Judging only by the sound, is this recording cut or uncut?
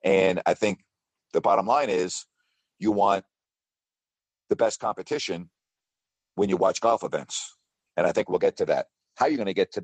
uncut